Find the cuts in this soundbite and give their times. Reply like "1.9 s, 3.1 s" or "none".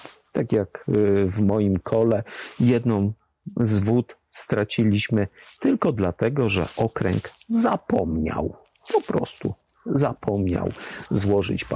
none